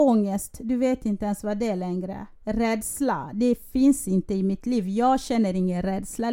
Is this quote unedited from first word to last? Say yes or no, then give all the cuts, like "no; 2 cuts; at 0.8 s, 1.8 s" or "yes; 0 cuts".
no; 1 cut; at 2.4 s